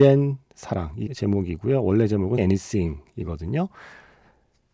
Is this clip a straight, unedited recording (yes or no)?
no